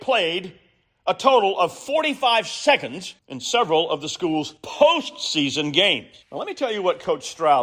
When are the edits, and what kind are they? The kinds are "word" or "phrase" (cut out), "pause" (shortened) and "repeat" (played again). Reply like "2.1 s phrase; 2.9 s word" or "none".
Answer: 3.2 s pause; 4.6 s pause; 6.2 s pause